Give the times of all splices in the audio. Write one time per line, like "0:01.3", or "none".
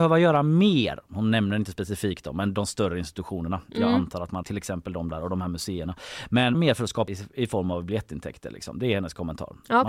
0:04.4
0:06.5
0:07.1